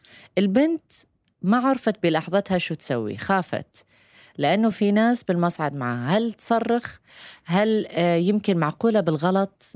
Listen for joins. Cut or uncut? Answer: uncut